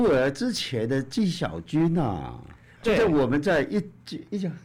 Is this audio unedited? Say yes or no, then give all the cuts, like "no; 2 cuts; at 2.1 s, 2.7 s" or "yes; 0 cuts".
no; 1 cut; at 2.8 s